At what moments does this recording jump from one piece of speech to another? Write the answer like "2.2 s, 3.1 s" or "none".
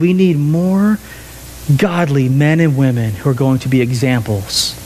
none